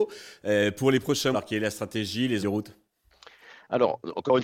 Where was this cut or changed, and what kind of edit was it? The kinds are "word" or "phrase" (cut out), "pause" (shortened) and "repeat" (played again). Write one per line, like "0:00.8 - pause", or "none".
0:01.3 - word
0:02.4 - phrase